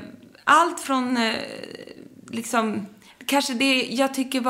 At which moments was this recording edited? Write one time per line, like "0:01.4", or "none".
0:03.1